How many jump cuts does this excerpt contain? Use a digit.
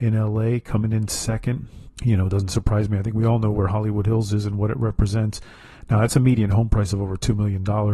1